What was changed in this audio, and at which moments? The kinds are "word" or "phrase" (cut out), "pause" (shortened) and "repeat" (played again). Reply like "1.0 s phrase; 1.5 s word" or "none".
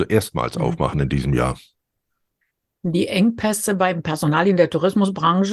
none